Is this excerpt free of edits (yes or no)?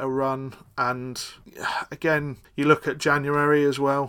yes